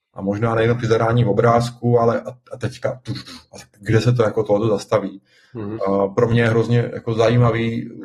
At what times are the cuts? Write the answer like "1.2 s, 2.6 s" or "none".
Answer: none